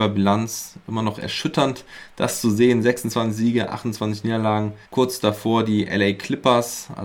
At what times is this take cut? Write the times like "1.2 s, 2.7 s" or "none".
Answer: 4.8 s